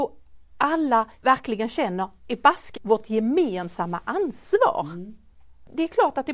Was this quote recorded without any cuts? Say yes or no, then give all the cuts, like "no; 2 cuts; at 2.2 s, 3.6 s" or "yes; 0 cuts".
no; 3 cuts; at 1.2 s, 2.2 s, 2.8 s